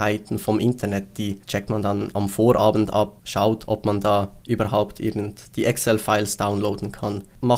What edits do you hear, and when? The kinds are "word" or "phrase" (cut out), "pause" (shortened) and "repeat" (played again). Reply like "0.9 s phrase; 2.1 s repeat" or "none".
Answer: none